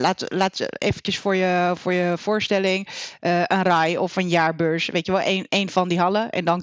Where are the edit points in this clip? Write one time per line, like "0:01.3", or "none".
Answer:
none